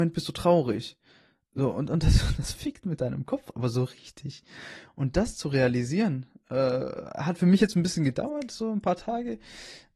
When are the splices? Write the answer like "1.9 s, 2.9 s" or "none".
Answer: none